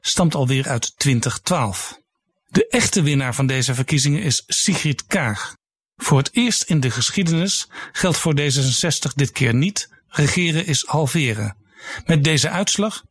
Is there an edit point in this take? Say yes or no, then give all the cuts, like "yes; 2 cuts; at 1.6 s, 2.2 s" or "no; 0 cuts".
no; 0 cuts